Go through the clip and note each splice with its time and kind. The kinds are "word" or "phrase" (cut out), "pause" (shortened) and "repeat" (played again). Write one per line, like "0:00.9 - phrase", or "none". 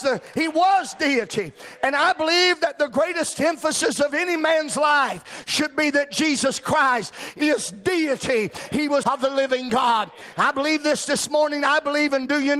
0:09.0 - phrase

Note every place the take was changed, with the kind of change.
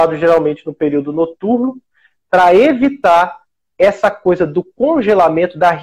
none

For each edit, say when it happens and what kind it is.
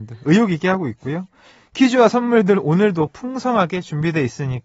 none

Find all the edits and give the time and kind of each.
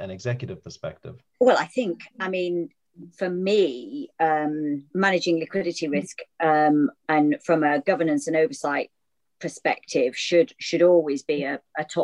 0:01.3 - pause
0:03.1 - pause
0:04.9 - pause

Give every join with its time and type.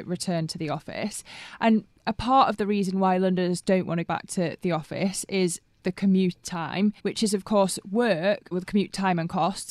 0:04.0 - word
0:07.0 - pause
0:08.5 - word

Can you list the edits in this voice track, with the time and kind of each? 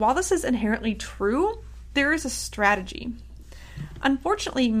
none

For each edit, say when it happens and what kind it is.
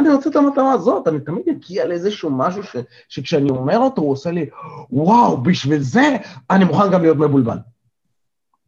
none

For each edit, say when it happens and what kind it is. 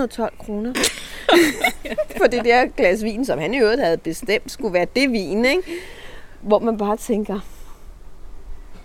none

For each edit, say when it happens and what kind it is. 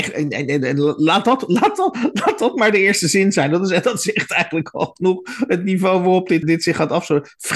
0:06.4 - word

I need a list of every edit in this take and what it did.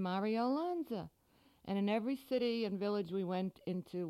none

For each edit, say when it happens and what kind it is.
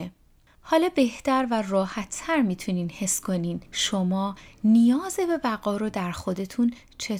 0:03.7 - pause

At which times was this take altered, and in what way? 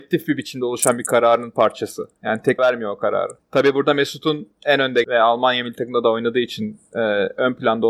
0:02.6 - word
0:03.4 - pause
0:05.0 - word

